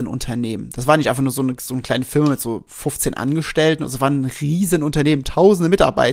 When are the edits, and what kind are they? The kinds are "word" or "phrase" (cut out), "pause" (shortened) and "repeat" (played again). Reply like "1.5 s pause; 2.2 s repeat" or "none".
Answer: none